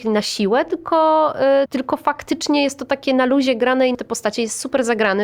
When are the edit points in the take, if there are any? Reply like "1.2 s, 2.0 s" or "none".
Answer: 1.7 s, 3.9 s